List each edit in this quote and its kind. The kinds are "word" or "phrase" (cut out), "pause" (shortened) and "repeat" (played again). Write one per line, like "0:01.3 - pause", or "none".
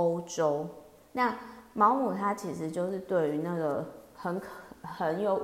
none